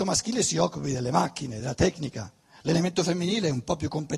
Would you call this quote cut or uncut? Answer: uncut